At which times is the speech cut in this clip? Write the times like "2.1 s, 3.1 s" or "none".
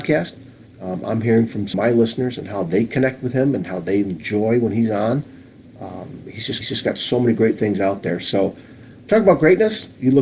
1.7 s, 6.6 s